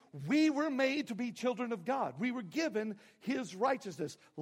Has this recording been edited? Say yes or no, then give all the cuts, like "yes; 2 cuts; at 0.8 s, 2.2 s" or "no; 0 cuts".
no; 0 cuts